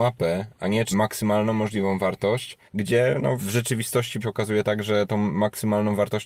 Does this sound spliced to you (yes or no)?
yes